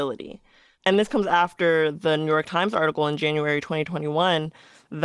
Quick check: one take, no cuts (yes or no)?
yes